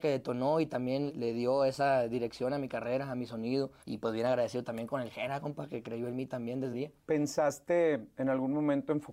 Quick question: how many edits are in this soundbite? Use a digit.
3